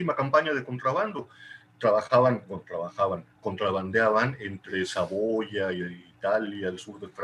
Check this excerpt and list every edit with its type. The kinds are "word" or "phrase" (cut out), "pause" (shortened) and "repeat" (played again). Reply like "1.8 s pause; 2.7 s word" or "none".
none

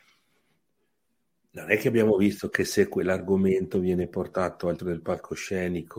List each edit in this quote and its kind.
4.8 s word

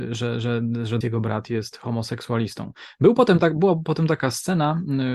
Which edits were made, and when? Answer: 1.0 s word

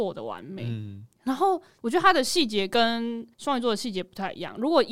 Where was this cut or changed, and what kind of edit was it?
3.3 s pause

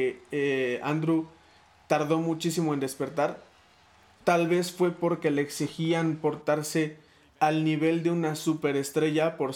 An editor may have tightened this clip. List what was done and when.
none

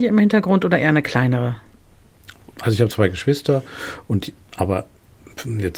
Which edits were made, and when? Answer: none

